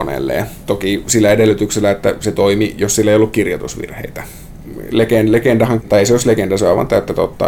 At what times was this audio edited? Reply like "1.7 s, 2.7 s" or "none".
5.8 s